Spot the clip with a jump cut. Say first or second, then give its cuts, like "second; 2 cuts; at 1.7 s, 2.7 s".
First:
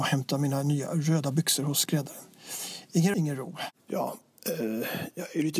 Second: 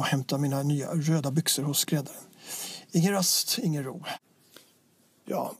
first; 2 cuts; at 3.1 s, 3.8 s